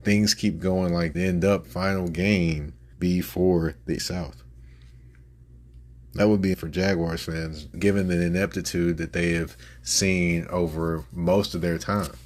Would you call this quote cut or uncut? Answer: cut